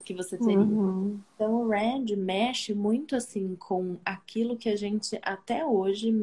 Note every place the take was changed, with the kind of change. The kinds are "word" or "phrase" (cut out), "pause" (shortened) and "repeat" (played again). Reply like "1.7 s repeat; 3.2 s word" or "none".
none